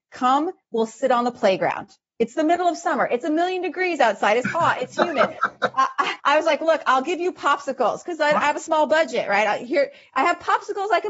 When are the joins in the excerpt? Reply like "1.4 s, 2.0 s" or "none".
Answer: 6.2 s

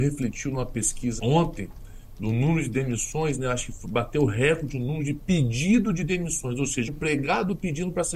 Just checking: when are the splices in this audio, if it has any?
1.2 s, 6.9 s

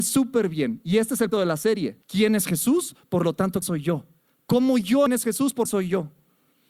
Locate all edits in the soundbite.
1.3 s, 2.0 s, 3.6 s, 4.2 s, 5.1 s, 5.7 s

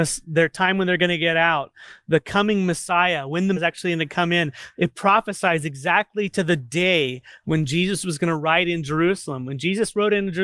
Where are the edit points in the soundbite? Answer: 3.6 s

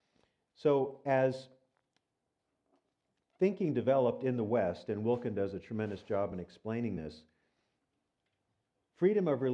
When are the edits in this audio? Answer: none

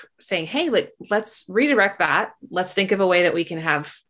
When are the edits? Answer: none

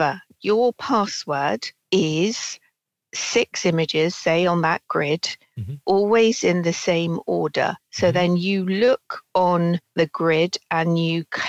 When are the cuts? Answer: none

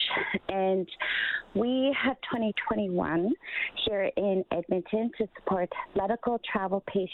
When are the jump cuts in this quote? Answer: 2.2 s

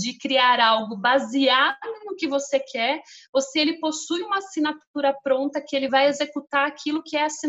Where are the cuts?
none

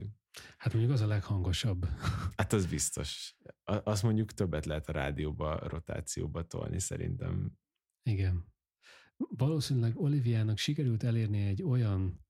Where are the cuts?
none

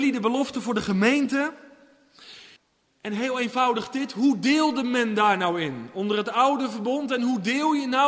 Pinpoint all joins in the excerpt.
2.6 s

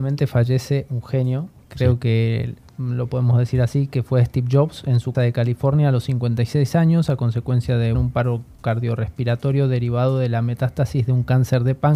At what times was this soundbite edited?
5.1 s, 7.9 s

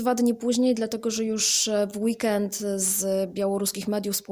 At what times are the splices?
none

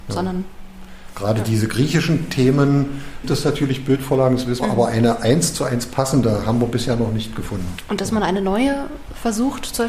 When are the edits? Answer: 3.2 s, 4.6 s

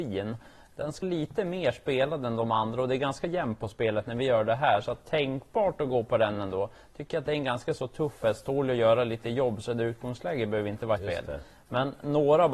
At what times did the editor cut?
1.0 s, 11.0 s

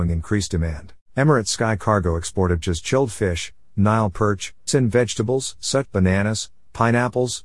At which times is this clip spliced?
1.0 s, 2.6 s, 4.7 s, 5.9 s

